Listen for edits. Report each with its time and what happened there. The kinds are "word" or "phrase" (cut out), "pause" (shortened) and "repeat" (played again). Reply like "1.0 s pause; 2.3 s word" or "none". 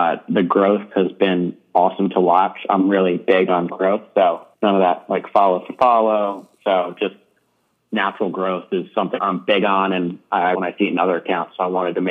3.7 s phrase; 4.5 s pause; 6.5 s pause; 9.2 s word; 10.5 s phrase

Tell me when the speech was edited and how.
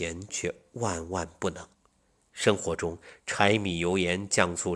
1.7 s pause

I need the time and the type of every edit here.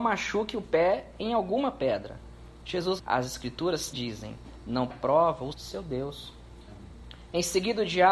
3.0 s word; 3.9 s word; 4.9 s word; 5.5 s word

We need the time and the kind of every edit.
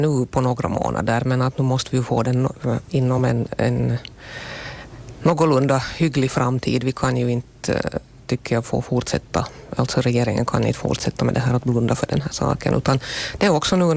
none

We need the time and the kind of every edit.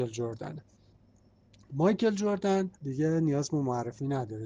2.8 s pause

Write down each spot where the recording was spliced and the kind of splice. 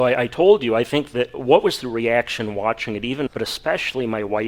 3.3 s phrase

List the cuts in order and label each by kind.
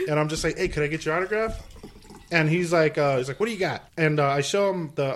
3.9 s pause

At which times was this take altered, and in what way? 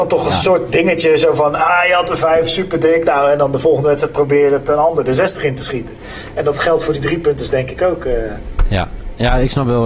none

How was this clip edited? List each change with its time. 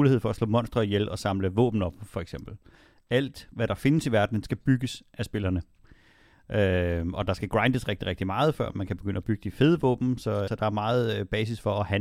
10.5 s word

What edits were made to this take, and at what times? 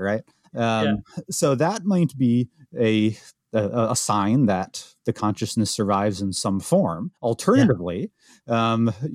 3.4 s word; 7.2 s pause

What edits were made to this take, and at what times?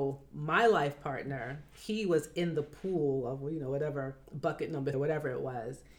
4.9 s word

